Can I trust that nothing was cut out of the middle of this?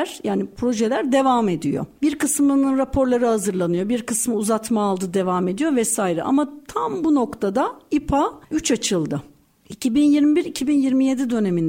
no; 1 cut; at 8.4 s

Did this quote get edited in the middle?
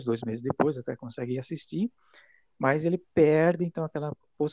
no; 0 cuts

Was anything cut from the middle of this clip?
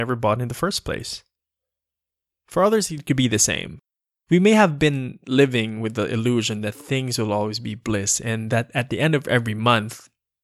no; 0 cuts

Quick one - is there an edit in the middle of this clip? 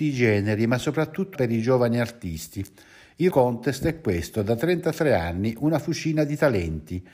yes; 2 cuts; at 1.4 s, 3.3 s

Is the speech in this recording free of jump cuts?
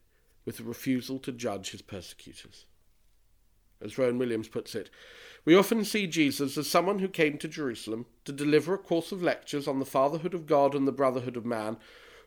yes; 0 cuts

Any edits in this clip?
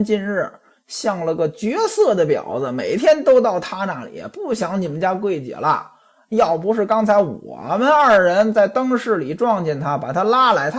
no; 0 cuts

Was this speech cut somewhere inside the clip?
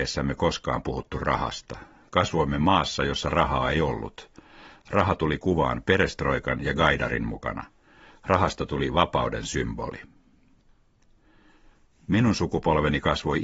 no; 0 cuts

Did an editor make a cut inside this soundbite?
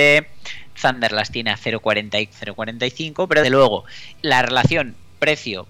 yes; 3 cuts; at 2.3 s, 3.4 s, 4.2 s

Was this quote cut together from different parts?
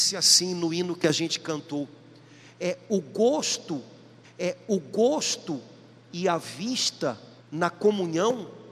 yes; 2 cuts; at 4.2 s, 7.4 s

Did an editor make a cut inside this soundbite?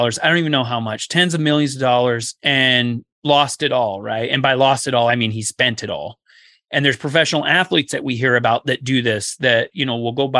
yes; 1 cut; at 3.1 s

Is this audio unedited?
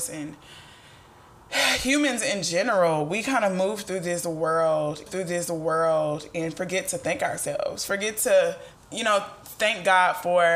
no; 2 cuts; at 5.1 s, 8.7 s

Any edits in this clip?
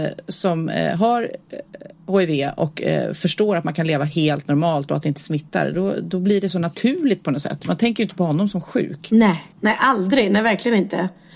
yes; 1 cut; at 9.5 s

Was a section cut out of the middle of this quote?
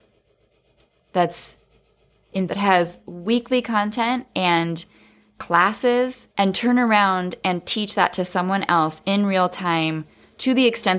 yes; 2 cuts; at 2.5 s, 6.3 s

